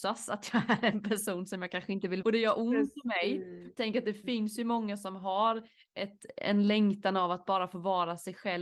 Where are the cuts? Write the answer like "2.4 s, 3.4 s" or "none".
2.2 s, 3.8 s